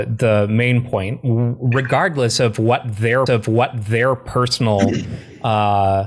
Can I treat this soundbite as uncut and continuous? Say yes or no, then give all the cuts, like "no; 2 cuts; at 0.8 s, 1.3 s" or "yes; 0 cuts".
no; 1 cut; at 3.3 s